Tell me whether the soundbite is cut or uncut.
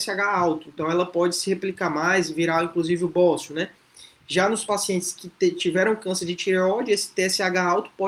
uncut